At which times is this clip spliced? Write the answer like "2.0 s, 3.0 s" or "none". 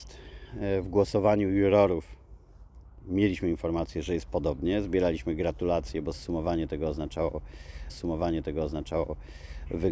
7.9 s